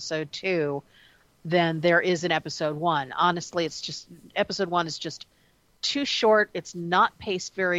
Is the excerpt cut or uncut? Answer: uncut